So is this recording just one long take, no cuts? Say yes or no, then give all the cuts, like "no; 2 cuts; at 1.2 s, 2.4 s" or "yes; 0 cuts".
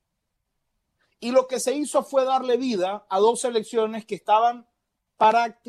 yes; 0 cuts